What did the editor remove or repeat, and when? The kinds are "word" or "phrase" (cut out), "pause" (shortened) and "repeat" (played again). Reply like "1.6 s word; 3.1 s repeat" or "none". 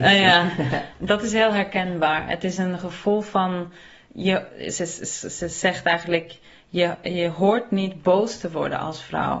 none